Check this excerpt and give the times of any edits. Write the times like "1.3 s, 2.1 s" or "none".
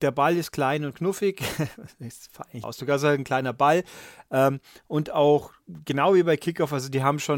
2.6 s